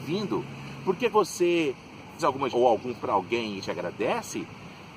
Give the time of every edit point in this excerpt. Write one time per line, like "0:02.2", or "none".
0:01.1
0:02.2
0:02.5
0:03.0
0:03.6